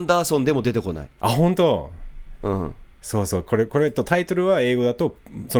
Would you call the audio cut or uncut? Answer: cut